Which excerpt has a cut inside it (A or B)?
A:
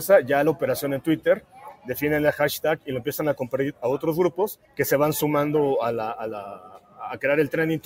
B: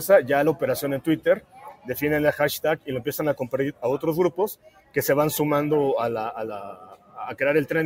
A